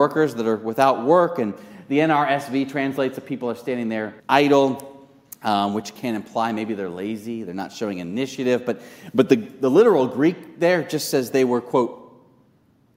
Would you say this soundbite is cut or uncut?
cut